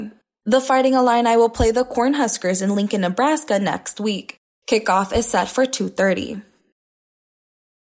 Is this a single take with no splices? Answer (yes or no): yes